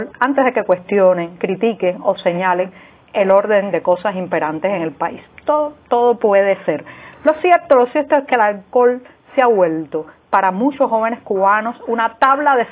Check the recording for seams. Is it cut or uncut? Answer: uncut